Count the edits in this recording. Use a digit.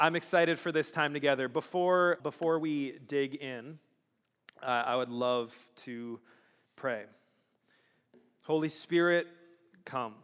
1